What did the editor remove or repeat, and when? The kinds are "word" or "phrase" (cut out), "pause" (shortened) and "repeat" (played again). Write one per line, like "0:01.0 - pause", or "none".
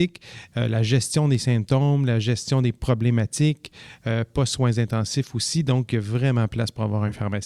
none

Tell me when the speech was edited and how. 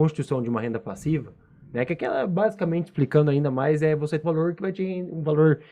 0:04.2 - word

